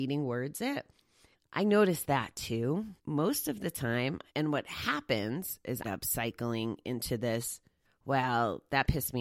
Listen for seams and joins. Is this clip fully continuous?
no; 5 cuts; at 1.3 s, 3.0 s, 4.3 s, 5.8 s, 7.8 s

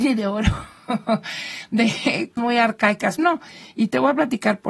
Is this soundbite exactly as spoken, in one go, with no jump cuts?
no; 2 cuts; at 2.4 s, 3.2 s

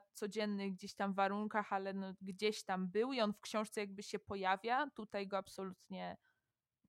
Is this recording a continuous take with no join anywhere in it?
yes; 0 cuts

